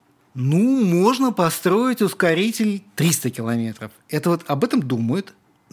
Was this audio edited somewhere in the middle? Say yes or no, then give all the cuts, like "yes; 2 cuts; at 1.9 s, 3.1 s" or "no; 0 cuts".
no; 0 cuts